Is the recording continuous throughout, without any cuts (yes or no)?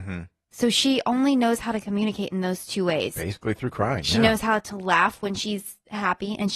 yes